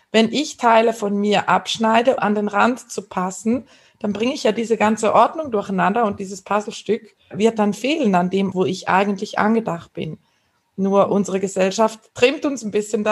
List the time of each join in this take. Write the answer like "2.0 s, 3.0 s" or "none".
2.2 s, 7.3 s, 8.5 s